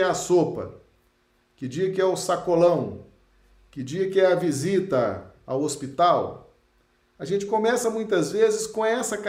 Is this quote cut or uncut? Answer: uncut